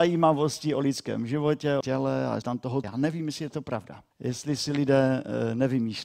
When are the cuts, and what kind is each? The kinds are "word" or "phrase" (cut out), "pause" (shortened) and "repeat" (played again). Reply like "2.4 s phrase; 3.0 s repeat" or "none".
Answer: 1.8 s phrase; 2.4 s word; 2.8 s phrase; 4.1 s pause